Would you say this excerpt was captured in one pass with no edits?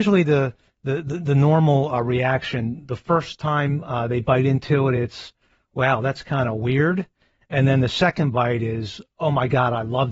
yes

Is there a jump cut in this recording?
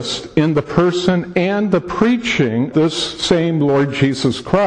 yes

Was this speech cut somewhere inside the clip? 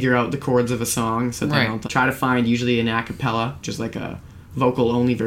yes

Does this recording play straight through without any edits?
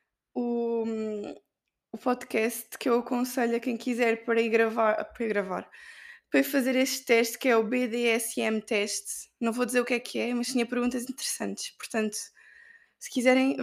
yes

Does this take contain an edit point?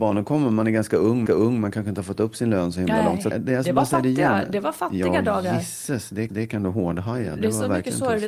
yes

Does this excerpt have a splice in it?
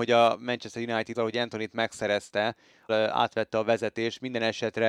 yes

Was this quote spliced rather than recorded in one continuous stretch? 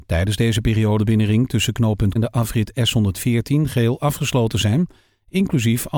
yes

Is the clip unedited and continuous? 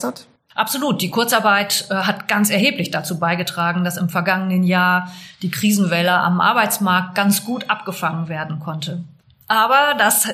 yes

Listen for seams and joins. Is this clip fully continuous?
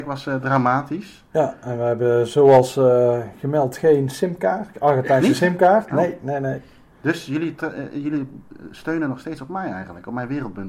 yes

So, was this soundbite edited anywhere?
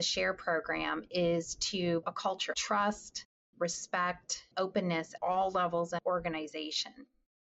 yes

